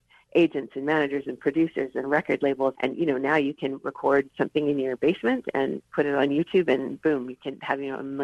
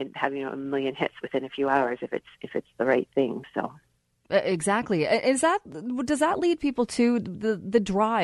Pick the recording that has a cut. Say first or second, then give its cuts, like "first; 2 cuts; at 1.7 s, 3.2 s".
first; 1 cut; at 2.7 s